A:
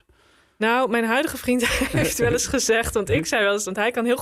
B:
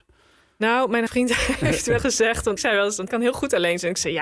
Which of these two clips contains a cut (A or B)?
B